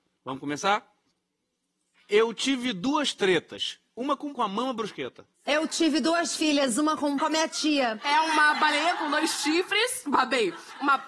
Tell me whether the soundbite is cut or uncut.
cut